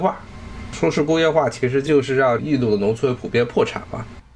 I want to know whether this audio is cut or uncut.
uncut